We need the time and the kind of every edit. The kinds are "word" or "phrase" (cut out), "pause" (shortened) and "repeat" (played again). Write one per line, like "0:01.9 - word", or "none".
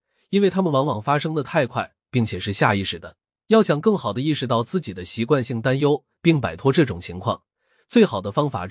none